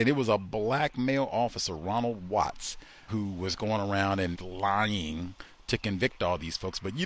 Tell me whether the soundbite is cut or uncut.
cut